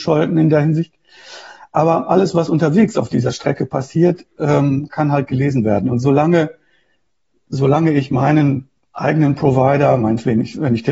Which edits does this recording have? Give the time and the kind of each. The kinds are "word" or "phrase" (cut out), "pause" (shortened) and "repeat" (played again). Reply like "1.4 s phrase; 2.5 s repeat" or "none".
none

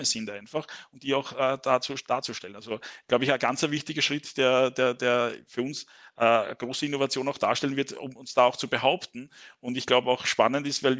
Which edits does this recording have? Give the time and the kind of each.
none

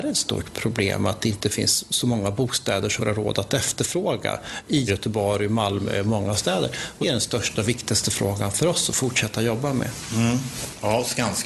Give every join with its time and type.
3.0 s word; 4.9 s word; 7.0 s word

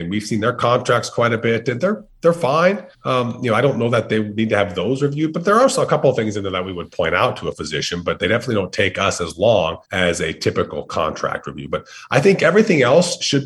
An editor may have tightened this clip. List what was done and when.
2.9 s pause; 9.8 s pause

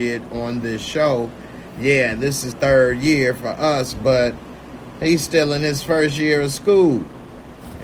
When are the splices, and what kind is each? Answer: 2.5 s phrase

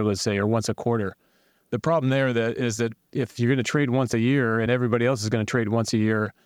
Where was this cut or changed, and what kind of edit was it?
none

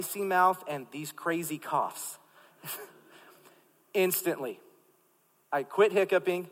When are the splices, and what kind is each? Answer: none

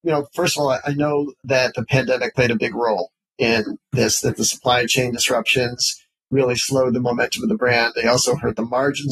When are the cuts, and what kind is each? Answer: none

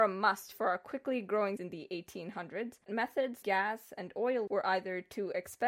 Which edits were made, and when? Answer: 1.6 s word; 2.9 s word; 3.4 s word; 4.5 s word

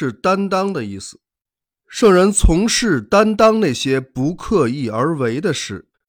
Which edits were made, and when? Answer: none

